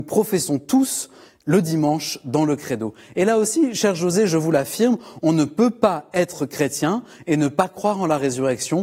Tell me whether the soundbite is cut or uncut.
uncut